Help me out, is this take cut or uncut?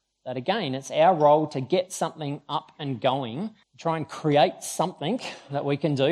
cut